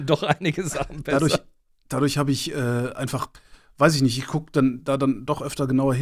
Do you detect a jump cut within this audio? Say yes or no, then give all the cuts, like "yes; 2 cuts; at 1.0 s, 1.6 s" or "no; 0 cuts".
no; 0 cuts